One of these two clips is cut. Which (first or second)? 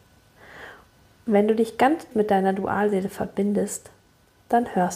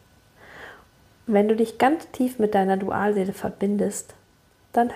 first